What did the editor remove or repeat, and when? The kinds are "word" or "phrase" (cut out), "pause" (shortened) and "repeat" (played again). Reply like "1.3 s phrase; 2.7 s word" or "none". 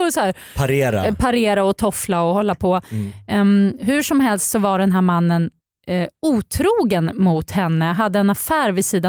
none